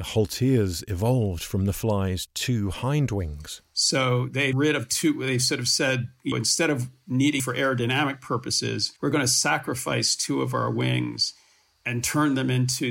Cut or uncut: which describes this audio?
cut